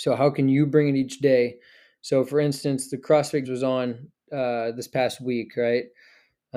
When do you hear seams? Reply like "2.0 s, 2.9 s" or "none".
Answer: 3.4 s, 4.1 s